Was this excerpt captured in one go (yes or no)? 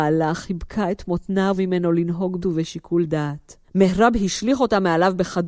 no